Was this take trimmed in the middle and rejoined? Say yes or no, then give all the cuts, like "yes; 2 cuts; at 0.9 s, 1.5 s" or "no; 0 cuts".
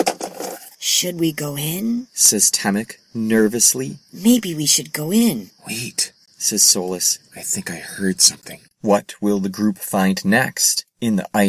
no; 0 cuts